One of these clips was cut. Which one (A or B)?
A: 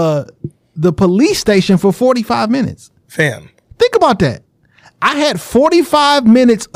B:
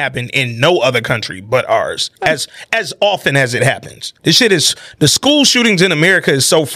B